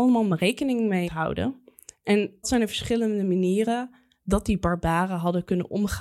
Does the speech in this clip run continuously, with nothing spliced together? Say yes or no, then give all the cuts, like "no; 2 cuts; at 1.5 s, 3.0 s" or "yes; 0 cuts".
no; 2 cuts; at 1.1 s, 2.4 s